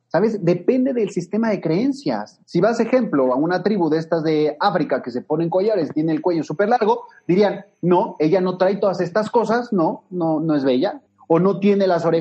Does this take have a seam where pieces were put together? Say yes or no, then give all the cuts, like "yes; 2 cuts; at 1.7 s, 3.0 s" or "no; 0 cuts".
yes; 3 cuts; at 2.4 s, 7.7 s, 11.1 s